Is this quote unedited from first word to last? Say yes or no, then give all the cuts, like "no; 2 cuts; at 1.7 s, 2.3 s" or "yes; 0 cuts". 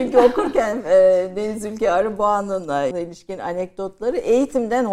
no; 1 cut; at 2.9 s